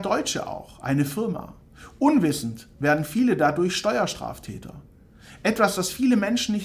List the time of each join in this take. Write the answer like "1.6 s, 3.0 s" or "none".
none